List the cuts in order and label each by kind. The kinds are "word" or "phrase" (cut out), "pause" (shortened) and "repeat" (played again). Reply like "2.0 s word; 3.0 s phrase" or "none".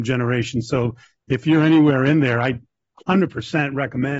none